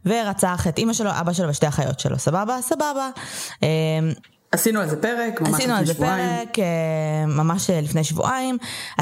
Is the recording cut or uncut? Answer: uncut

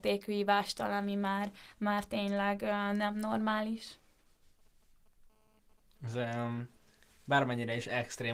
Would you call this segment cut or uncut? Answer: uncut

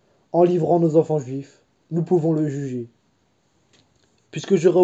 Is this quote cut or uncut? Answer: uncut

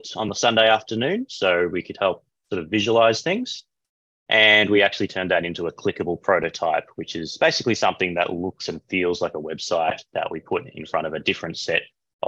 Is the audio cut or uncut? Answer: uncut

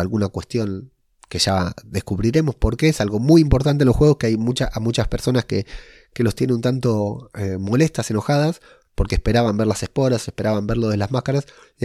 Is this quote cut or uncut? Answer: uncut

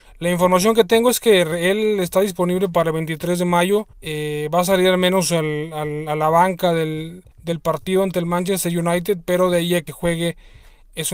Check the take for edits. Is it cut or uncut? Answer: cut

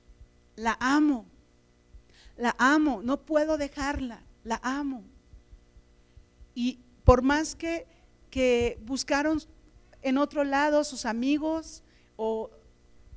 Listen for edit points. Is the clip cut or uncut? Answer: uncut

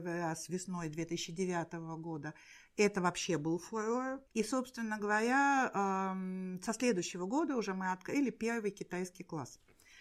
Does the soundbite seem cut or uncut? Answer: cut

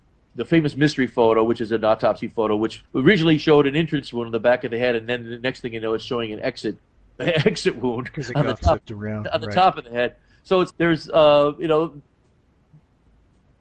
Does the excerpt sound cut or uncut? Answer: cut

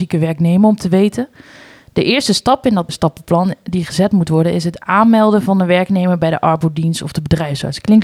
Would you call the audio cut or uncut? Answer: cut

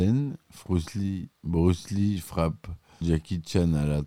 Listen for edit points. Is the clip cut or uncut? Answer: cut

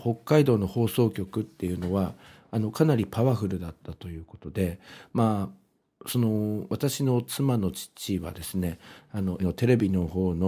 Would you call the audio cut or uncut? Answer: cut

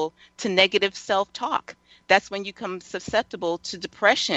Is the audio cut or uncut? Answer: uncut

